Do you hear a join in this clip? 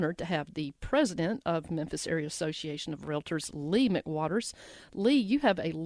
no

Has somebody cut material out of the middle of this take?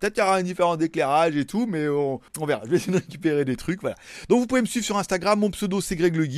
yes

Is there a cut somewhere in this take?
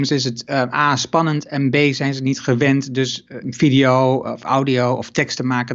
yes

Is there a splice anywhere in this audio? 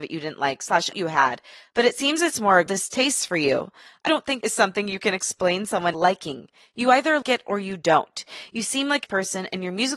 yes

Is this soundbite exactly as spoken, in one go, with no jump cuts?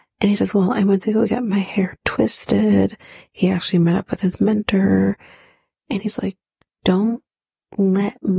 yes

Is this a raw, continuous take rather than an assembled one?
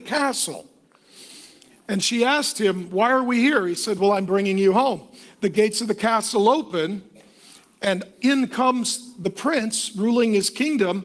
yes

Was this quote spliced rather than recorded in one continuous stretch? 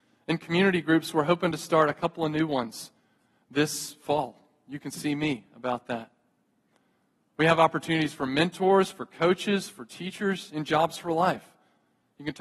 no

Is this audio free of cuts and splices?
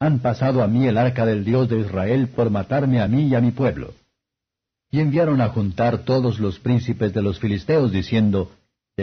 yes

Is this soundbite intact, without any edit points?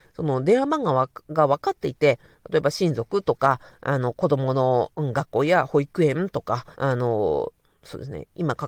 no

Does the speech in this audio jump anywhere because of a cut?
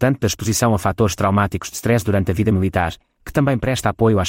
no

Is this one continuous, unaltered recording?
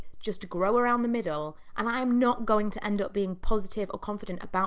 yes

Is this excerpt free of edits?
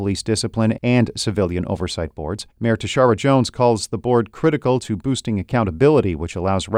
no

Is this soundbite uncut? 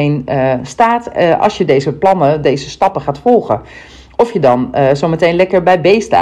yes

